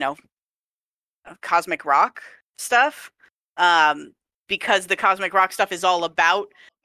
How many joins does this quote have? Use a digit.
0